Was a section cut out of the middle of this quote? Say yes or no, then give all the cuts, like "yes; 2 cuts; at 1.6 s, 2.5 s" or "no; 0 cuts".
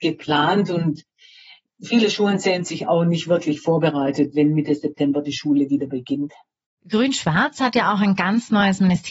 no; 0 cuts